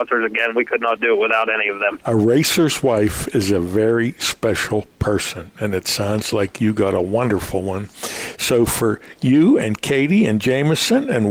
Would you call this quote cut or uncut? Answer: uncut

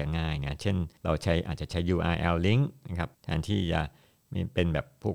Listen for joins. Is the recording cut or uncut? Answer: cut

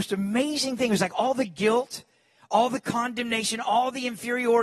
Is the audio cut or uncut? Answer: uncut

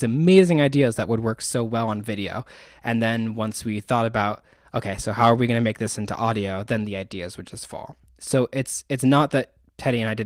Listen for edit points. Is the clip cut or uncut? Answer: uncut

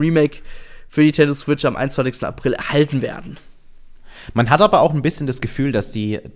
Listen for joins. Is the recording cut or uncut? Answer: uncut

